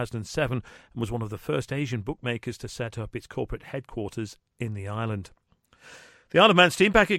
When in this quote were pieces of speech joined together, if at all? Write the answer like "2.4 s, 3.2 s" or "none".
none